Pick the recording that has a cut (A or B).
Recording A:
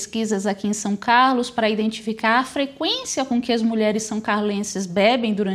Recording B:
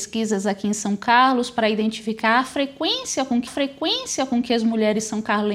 B